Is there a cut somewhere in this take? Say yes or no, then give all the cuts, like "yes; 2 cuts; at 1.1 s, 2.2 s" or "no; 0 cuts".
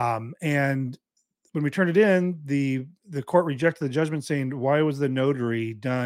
no; 0 cuts